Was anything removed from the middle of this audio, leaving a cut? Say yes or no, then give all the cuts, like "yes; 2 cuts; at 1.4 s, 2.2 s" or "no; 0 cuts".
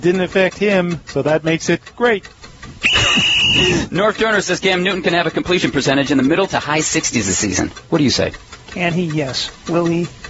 no; 0 cuts